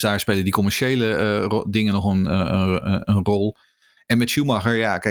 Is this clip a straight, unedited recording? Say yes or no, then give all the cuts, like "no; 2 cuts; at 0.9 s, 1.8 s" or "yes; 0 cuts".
yes; 0 cuts